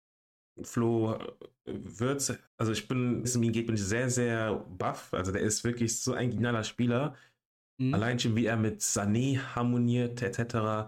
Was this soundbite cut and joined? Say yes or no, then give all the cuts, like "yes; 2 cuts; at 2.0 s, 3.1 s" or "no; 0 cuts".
yes; 2 cuts; at 2.5 s, 3.2 s